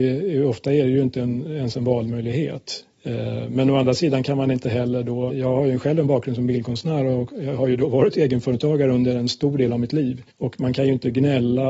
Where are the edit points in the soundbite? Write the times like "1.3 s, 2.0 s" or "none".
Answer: 2.9 s, 5.3 s, 10.3 s